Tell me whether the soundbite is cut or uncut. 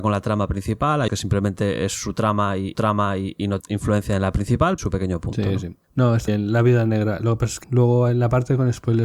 cut